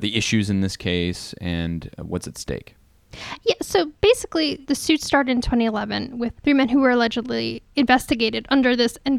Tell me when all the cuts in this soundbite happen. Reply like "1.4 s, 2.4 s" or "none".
none